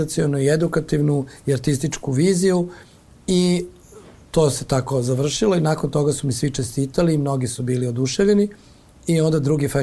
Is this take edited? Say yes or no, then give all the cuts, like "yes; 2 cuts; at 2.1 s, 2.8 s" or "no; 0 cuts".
no; 0 cuts